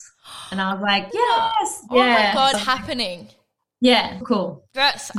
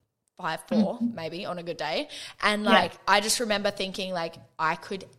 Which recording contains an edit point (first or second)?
first